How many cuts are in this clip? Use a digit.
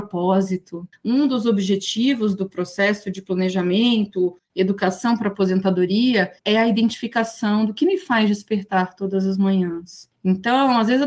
2